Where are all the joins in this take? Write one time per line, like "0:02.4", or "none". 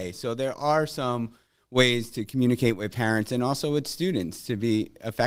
none